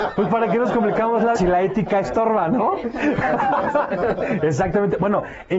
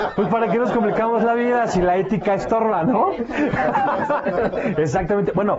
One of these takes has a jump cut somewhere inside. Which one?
first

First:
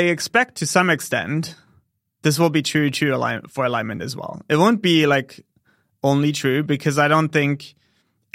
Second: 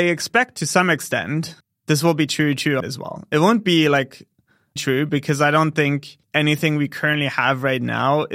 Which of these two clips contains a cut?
second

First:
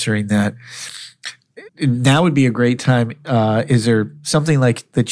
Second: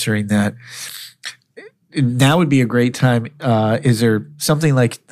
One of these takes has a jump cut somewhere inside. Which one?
first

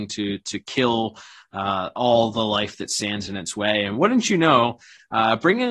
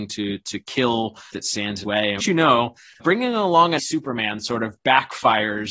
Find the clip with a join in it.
second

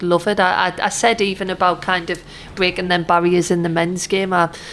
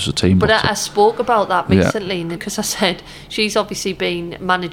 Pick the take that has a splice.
second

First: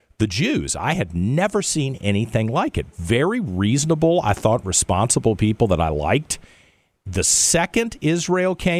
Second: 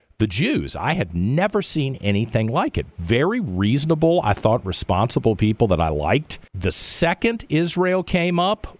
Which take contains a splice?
second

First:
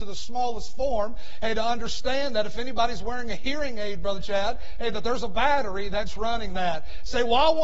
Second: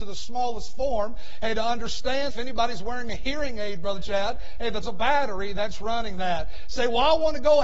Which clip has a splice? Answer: second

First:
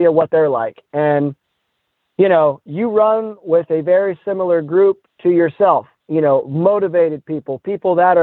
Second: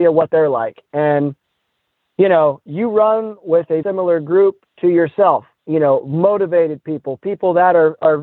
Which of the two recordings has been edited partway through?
second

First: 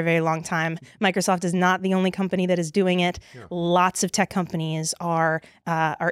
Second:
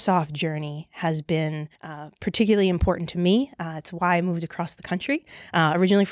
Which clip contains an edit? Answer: second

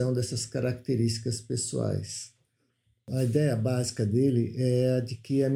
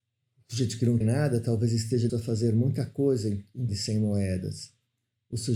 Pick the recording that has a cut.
second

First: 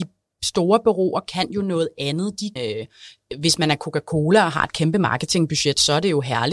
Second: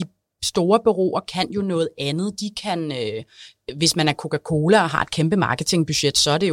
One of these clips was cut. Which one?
first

